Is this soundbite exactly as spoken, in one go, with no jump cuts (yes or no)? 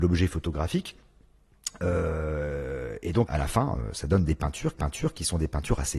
no